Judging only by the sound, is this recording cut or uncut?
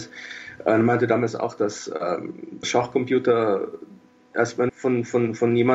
cut